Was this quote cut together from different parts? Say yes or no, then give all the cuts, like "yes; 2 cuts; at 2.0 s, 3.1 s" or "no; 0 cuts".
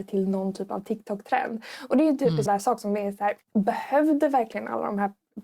yes; 2 cuts; at 2.5 s, 3.4 s